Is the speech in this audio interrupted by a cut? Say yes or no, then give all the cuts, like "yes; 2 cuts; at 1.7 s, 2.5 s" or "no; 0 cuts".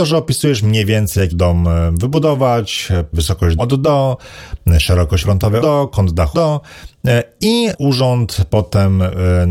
yes; 7 cuts; at 1.3 s, 3.1 s, 3.6 s, 5.2 s, 5.6 s, 6.3 s, 7.7 s